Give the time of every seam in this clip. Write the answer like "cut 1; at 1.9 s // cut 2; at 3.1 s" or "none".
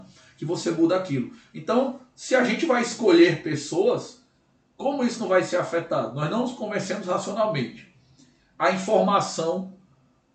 none